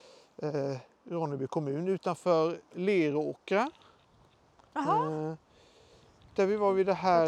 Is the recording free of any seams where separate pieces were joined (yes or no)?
yes